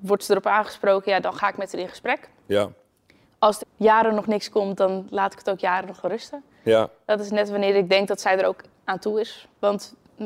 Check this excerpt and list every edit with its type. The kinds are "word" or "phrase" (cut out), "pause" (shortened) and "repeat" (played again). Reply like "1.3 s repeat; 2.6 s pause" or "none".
3.6 s word